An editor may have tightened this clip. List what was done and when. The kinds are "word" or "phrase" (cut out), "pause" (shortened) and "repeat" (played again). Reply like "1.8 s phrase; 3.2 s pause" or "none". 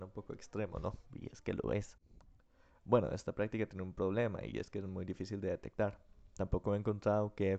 none